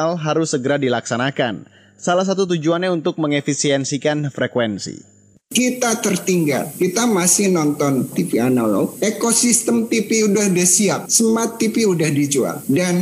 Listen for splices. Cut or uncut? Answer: uncut